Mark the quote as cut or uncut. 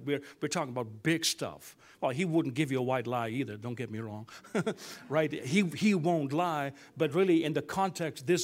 uncut